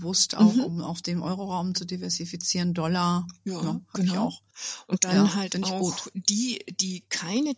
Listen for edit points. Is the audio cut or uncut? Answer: uncut